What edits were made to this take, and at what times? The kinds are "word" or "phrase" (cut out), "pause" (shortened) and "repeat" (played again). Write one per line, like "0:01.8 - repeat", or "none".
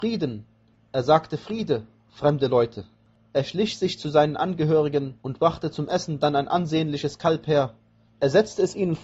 none

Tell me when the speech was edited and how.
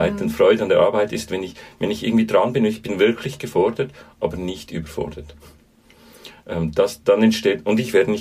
none

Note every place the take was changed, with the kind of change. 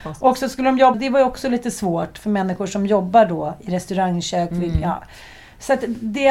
0:00.9 - word

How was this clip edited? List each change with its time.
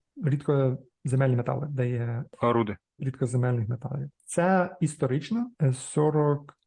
0:03.0 - word

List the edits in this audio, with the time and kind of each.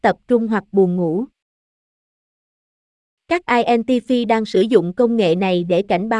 0:03.5 - phrase

